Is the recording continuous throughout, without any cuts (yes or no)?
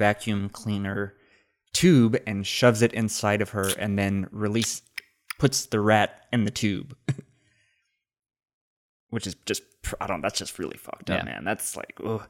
yes